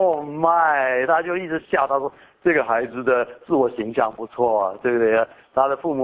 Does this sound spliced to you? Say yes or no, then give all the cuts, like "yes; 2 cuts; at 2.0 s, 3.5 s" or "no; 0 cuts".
no; 0 cuts